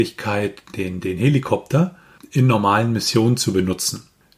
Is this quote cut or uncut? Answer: uncut